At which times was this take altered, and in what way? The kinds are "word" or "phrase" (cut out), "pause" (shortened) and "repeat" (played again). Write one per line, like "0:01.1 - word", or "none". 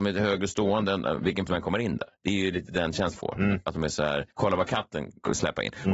0:01.5 - word
0:02.1 - pause
0:03.1 - word
0:04.3 - pause